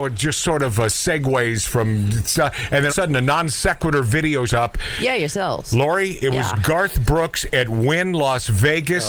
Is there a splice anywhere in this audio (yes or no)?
yes